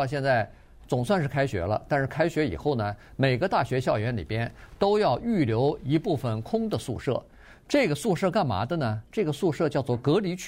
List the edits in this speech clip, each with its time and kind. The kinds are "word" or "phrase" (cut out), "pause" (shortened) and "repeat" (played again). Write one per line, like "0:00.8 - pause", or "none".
none